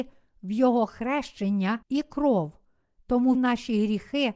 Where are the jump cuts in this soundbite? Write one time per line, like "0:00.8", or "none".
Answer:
0:01.8
0:03.3